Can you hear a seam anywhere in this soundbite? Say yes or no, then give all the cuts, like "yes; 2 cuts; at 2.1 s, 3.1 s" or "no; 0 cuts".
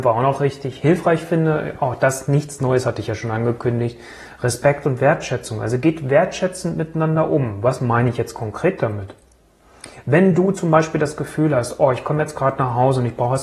no; 0 cuts